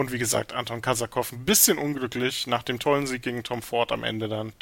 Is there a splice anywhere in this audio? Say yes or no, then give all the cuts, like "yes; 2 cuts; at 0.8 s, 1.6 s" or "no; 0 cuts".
no; 0 cuts